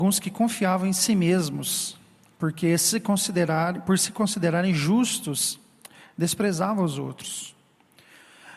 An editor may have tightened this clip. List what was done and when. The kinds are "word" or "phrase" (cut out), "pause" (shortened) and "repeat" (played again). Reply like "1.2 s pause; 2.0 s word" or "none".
none